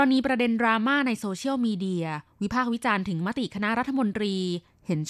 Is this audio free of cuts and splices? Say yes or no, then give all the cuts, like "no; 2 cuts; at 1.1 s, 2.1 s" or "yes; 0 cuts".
yes; 0 cuts